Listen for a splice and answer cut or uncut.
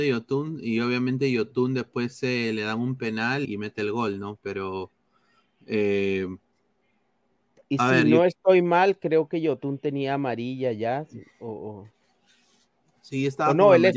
cut